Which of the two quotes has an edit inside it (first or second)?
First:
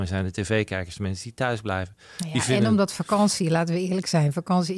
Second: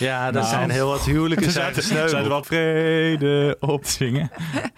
second